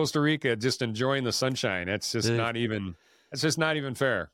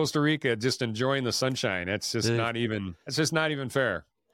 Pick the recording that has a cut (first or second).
second